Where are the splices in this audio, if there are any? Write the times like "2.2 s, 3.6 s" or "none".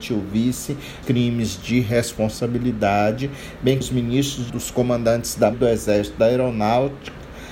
1.0 s, 3.8 s, 4.5 s, 5.5 s